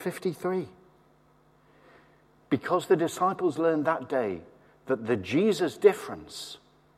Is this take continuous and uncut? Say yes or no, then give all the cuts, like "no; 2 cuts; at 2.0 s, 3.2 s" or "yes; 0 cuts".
yes; 0 cuts